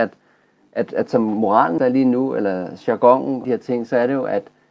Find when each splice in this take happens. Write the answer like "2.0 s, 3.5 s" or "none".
1.8 s, 3.4 s